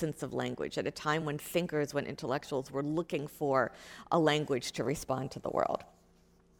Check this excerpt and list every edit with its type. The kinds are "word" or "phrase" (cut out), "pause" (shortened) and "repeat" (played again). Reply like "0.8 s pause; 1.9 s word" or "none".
none